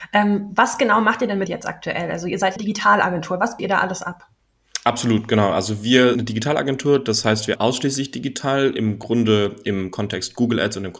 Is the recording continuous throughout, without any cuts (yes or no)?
no